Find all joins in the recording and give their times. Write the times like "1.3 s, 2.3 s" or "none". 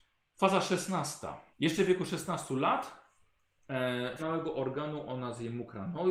1.5 s, 4.2 s